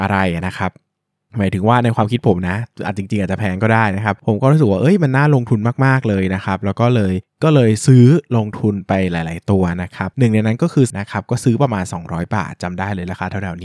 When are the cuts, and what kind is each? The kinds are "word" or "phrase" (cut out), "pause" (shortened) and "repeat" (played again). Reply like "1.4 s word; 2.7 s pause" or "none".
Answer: 10.9 s word